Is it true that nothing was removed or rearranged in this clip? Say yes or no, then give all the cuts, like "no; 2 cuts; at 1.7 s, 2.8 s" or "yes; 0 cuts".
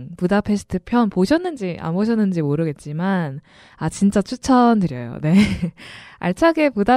yes; 0 cuts